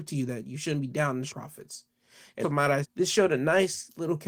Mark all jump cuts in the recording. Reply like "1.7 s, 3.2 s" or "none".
1.3 s, 2.4 s, 2.8 s